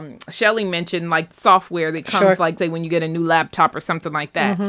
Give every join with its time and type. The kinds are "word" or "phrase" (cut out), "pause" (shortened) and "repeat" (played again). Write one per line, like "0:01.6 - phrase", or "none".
0:01.3 - phrase
0:02.6 - word